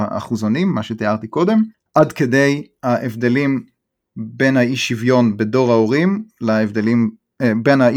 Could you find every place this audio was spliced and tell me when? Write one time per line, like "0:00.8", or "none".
none